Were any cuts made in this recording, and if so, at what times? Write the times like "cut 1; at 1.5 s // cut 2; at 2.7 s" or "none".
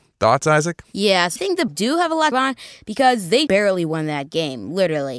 cut 1; at 1.4 s // cut 2; at 1.7 s // cut 3; at 2.3 s // cut 4; at 3.5 s

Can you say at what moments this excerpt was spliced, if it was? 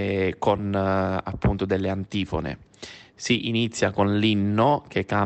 none

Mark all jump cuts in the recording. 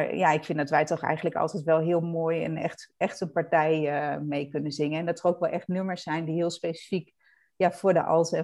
none

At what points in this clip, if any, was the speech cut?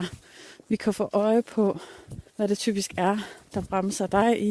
cut 1; at 2.3 s

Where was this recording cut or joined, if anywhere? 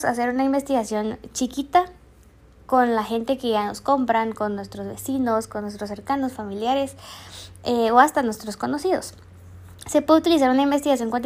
none

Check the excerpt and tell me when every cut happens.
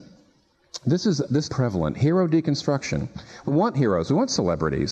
cut 1; at 1.5 s // cut 2; at 3.5 s

